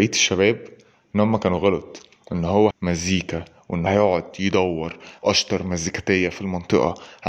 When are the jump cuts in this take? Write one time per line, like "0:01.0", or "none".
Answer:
0:02.7
0:03.9
0:05.2